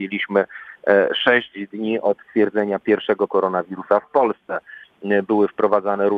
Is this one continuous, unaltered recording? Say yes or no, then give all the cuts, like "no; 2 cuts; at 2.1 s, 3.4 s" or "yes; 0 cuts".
no; 2 cuts; at 2.2 s, 3.3 s